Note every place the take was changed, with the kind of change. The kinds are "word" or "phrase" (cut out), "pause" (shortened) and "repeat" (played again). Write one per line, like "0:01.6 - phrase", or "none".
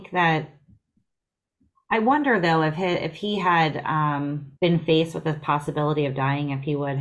0:04.6 - pause